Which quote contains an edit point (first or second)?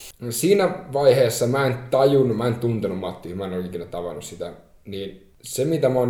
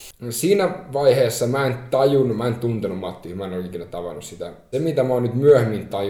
second